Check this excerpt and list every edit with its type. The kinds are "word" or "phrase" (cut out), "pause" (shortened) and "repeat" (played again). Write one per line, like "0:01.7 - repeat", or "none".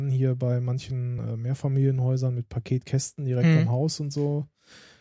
none